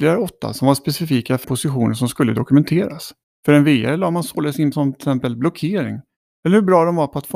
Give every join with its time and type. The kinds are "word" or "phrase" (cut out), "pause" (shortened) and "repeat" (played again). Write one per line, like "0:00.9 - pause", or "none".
0:01.4 - word
0:03.2 - pause
0:04.7 - word